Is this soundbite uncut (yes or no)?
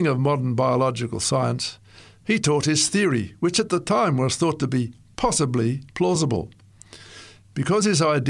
yes